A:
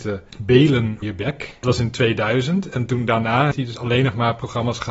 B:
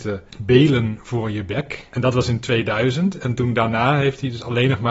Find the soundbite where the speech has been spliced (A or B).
A